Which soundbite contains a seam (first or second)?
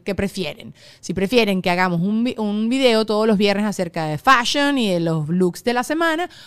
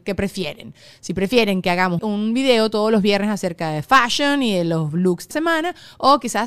second